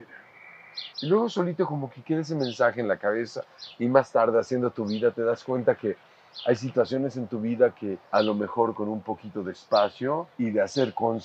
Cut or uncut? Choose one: cut